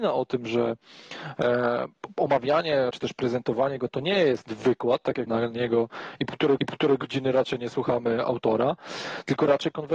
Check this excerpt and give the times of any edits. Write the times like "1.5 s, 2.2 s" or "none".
2.9 s, 5.3 s, 6.6 s